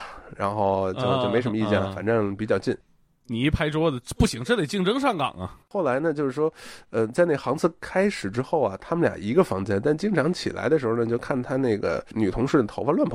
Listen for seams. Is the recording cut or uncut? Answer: uncut